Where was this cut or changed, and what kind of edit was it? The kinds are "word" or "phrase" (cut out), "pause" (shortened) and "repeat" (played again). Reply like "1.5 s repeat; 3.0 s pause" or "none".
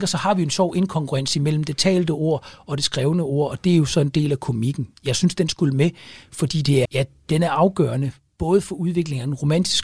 6.8 s word